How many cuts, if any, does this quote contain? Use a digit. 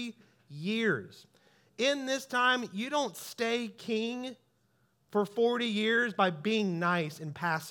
0